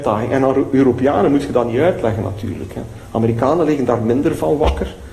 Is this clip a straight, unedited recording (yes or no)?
yes